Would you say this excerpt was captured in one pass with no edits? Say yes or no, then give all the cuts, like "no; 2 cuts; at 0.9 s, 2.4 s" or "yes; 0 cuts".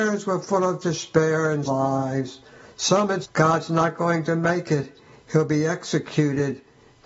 no; 2 cuts; at 1.7 s, 3.2 s